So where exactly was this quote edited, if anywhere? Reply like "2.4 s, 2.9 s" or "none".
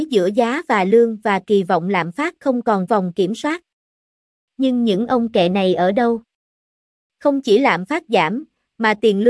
2.9 s